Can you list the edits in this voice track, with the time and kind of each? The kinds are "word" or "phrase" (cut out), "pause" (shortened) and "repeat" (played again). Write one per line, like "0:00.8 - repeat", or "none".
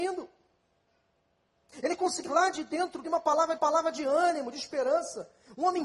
0:02.2 - word
0:03.0 - word
0:03.6 - repeat